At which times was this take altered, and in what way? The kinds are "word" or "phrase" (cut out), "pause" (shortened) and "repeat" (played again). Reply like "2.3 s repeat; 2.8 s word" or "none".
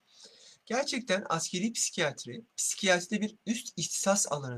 2.5 s pause